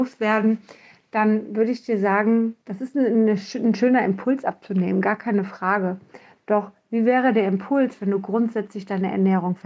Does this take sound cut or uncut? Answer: cut